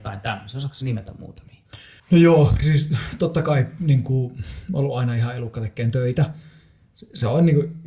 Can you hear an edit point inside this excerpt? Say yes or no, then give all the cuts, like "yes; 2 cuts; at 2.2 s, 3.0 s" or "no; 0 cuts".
yes; 1 cut; at 2.0 s